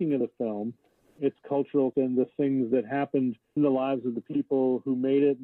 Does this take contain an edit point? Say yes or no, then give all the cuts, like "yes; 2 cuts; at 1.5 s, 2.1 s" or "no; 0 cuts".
yes; 3 cuts; at 1.2 s, 1.9 s, 3.6 s